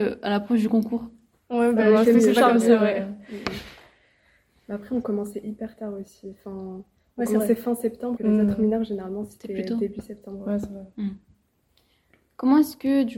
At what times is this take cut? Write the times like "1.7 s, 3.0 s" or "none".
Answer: 8.2 s